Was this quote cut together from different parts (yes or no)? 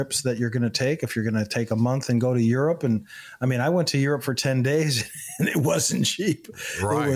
no